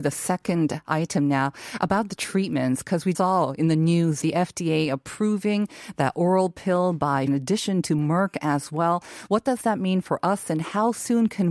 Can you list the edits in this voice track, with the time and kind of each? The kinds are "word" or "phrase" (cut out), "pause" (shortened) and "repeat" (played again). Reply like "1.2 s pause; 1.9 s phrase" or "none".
3.1 s word; 4.2 s word; 7.3 s phrase